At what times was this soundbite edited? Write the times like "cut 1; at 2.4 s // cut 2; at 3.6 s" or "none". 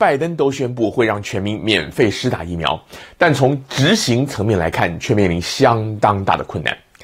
none